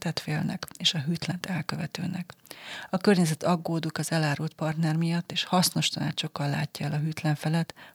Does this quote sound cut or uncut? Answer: uncut